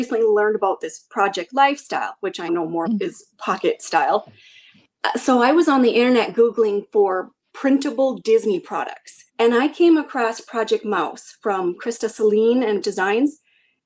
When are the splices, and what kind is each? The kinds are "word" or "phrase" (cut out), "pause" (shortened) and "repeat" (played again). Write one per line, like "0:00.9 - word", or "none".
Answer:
0:02.5 - word
0:02.9 - word
0:09.3 - pause
0:12.8 - word